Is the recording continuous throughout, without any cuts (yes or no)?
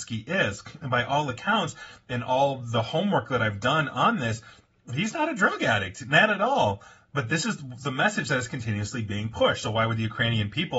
yes